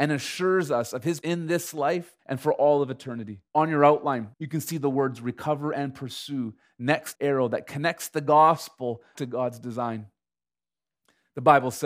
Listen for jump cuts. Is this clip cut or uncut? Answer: cut